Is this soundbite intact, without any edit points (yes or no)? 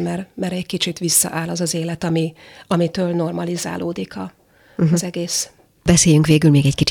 yes